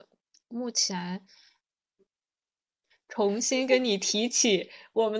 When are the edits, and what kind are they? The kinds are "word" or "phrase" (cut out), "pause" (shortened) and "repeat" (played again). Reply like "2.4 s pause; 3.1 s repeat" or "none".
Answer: none

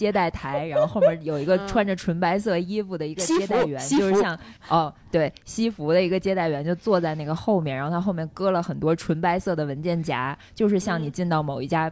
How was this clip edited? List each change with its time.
4.6 s pause

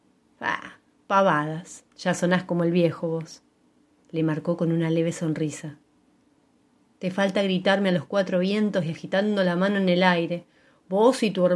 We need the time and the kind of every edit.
1.9 s pause

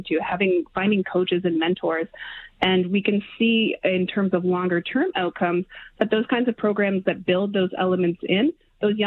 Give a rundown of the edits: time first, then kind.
none

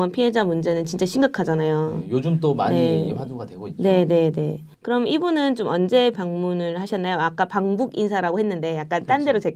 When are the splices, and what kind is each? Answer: 4.7 s pause; 6.1 s word

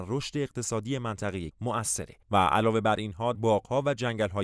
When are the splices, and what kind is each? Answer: 1.5 s word; 3.3 s word

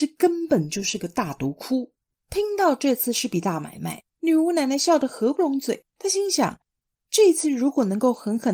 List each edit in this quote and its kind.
2.0 s pause; 4.1 s pause; 5.9 s pause

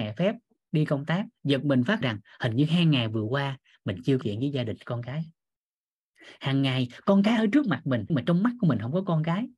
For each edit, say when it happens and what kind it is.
2.0 s word; 4.2 s word; 8.1 s word

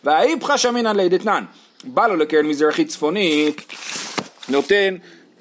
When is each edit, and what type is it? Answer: none

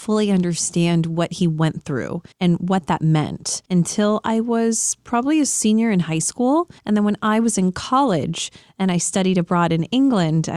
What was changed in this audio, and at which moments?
2.3 s pause; 3.6 s pause; 6.8 s pause

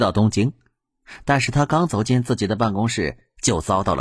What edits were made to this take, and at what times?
none

